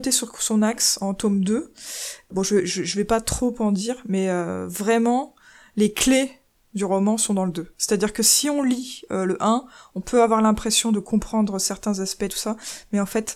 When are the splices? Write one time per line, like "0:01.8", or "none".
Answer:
none